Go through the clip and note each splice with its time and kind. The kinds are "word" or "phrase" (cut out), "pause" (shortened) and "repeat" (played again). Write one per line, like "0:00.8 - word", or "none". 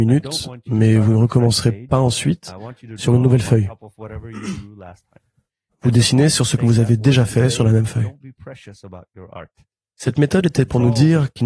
none